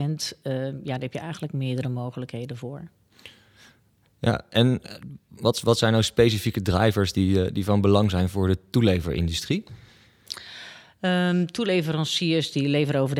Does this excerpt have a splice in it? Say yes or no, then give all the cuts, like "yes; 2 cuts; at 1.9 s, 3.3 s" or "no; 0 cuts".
no; 0 cuts